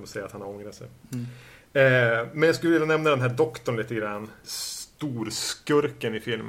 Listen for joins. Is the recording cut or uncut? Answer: uncut